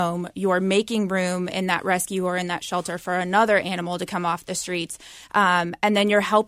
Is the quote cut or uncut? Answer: uncut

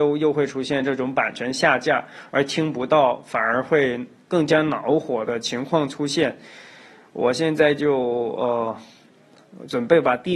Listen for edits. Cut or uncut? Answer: uncut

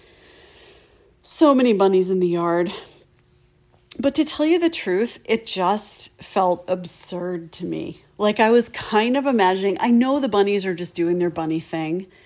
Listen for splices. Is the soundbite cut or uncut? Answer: uncut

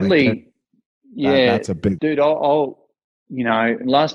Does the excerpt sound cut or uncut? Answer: cut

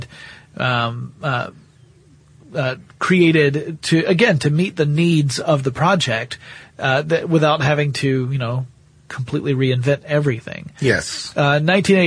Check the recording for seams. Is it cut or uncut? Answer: uncut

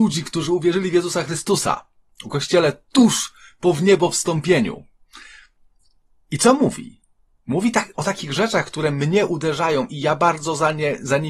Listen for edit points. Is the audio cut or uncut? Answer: uncut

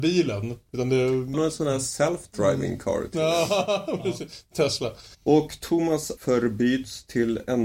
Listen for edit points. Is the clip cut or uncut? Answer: cut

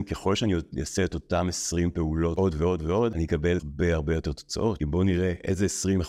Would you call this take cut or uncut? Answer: uncut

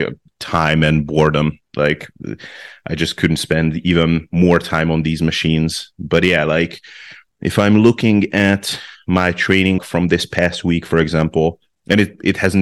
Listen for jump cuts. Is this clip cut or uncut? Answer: cut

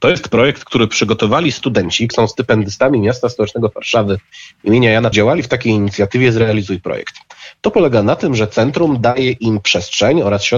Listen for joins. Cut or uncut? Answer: cut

